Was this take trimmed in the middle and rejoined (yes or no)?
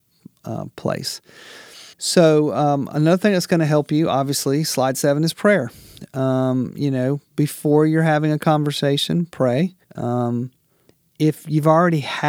yes